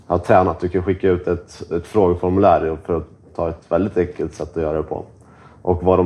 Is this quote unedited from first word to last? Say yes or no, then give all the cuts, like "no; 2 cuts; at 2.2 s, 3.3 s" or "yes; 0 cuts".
yes; 0 cuts